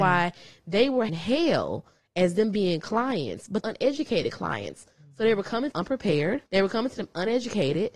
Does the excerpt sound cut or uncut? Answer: cut